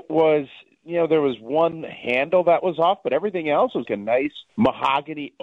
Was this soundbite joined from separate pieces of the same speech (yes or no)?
yes